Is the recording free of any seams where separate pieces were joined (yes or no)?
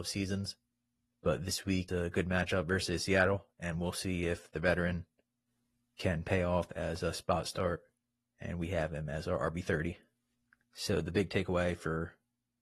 no